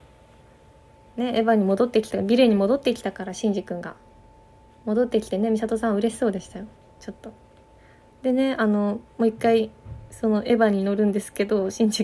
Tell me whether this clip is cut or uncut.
uncut